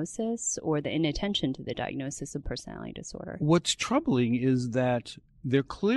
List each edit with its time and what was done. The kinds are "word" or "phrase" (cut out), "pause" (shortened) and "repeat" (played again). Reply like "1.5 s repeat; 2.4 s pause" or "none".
2.4 s word